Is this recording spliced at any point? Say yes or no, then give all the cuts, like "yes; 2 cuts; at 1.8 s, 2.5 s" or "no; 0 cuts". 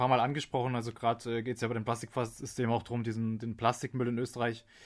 no; 0 cuts